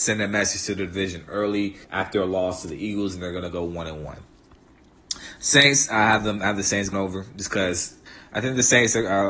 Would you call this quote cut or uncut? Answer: cut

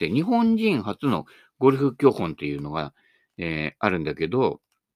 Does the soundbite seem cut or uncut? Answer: uncut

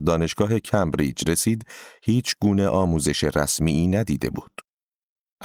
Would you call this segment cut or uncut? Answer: uncut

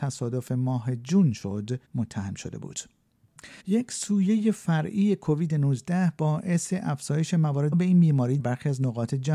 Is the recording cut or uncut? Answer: cut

